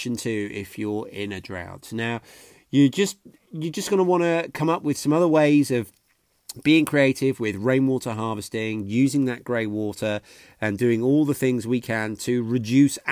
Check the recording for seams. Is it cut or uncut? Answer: uncut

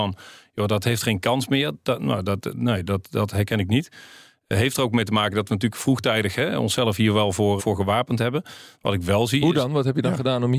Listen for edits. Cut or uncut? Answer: cut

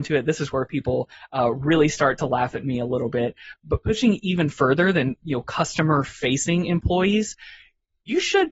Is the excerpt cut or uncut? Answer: cut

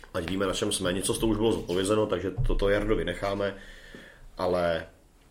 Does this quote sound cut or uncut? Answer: cut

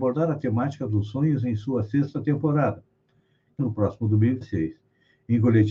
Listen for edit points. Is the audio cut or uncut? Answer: cut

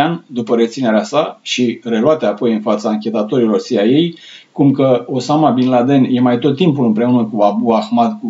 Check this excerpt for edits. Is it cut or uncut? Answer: uncut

